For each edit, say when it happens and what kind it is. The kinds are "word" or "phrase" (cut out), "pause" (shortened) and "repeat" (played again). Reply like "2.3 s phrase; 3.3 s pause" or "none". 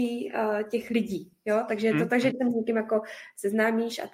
2.3 s word

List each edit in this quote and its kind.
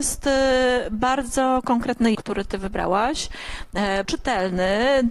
2.1 s word; 4.0 s word

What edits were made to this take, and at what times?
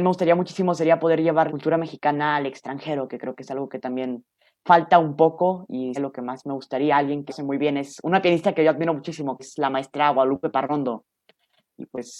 1.5 s word; 6.0 s word; 7.3 s word; 9.4 s word

